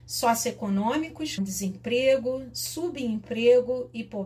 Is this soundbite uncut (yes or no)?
no